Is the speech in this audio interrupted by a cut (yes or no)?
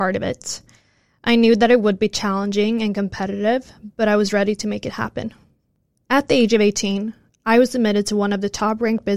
no